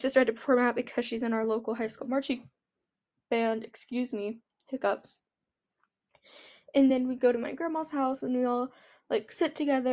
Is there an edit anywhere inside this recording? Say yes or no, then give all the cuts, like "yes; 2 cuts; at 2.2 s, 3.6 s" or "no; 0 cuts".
no; 0 cuts